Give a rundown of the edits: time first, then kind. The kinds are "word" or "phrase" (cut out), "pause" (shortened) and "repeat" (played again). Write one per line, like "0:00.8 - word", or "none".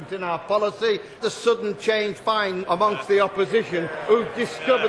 0:01.2 - word
0:02.2 - word
0:02.6 - word